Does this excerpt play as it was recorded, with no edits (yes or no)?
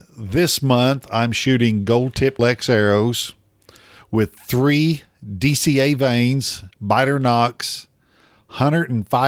no